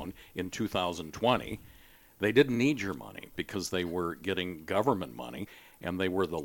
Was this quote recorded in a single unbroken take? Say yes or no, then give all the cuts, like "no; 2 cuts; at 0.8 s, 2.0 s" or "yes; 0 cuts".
yes; 0 cuts